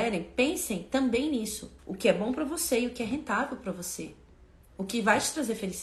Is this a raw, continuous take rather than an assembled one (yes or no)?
no